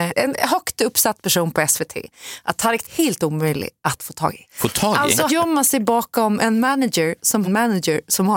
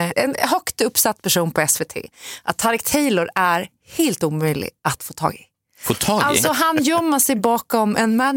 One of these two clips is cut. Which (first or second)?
first